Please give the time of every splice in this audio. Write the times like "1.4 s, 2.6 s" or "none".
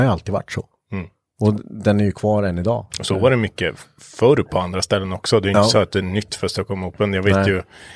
none